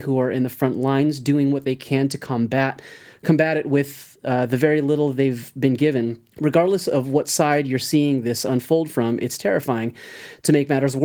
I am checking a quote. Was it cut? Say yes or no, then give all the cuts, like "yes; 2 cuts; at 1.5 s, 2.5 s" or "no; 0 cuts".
yes; 1 cut; at 6.3 s